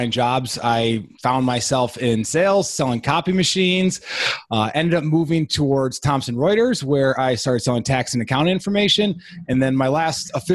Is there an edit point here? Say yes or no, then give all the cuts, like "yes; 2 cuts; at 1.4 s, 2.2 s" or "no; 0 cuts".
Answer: no; 0 cuts